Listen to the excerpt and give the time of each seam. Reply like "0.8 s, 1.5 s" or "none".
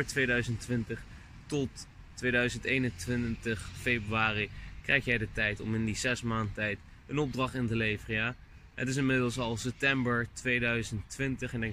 none

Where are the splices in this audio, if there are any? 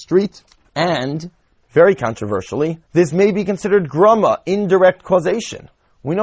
2.9 s

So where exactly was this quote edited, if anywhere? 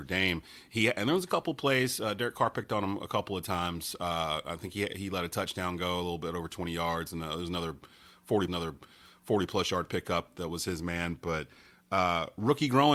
8.5 s

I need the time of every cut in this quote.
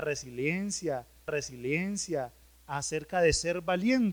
1.3 s

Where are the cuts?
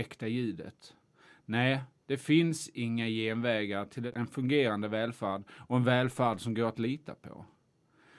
none

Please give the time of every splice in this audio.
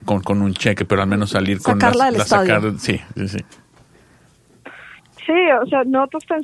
none

